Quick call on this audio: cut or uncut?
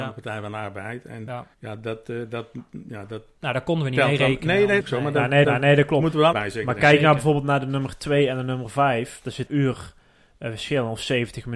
cut